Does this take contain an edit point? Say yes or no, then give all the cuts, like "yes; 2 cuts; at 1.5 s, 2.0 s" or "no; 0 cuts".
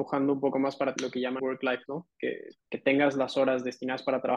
yes; 4 cuts; at 1.0 s, 1.4 s, 1.9 s, 2.6 s